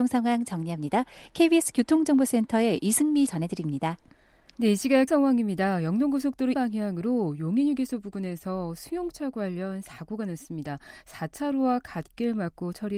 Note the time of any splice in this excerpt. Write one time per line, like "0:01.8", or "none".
0:03.3
0:05.1
0:06.5

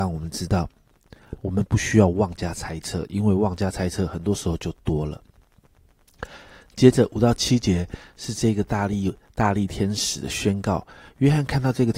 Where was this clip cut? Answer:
none

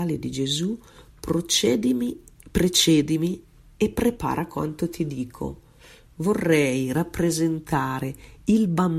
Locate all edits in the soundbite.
none

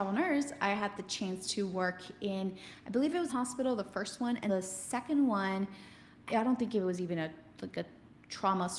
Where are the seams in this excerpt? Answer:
0:03.3
0:04.5
0:06.3

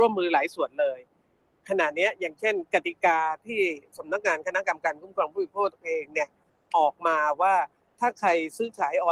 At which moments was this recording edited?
none

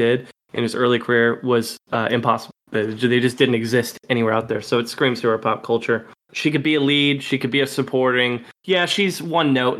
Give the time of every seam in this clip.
0:02.6
0:08.5

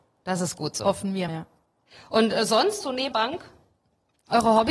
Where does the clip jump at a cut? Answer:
0:01.3
0:02.8
0:03.1

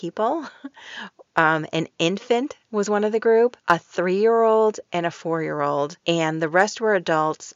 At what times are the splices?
0:03.6
0:06.0

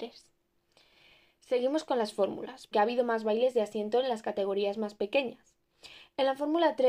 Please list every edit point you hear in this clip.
0:02.7

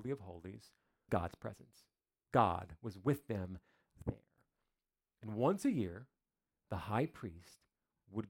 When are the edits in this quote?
0:01.1

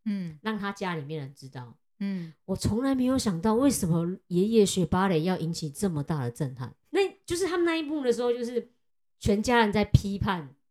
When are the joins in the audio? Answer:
0:06.8
0:08.9

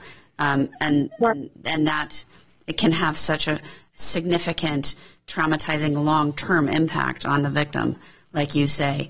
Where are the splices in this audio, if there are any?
none

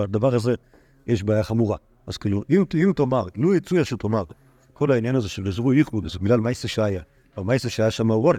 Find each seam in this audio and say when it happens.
none

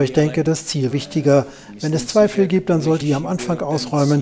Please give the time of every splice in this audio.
0:00.9
0:03.0

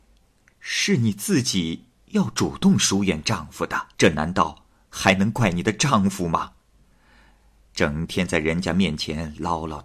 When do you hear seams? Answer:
0:03.9

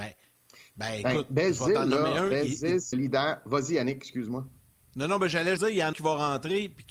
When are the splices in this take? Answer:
0:02.9
0:05.6
0:05.9

